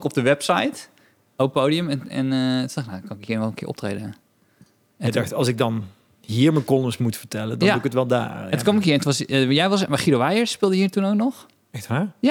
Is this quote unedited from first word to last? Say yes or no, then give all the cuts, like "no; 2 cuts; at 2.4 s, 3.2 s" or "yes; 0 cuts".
yes; 0 cuts